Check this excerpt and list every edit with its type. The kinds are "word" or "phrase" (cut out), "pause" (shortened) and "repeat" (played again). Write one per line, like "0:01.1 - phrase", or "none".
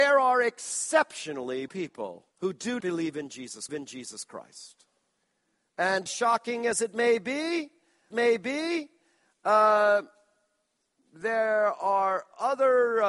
0:01.7 - word
0:02.3 - pause
0:02.8 - word
0:03.7 - repeat
0:06.1 - word
0:08.1 - repeat